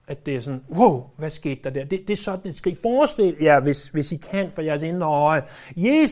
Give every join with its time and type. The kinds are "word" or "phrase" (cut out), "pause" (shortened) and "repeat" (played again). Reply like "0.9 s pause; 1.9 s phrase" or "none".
none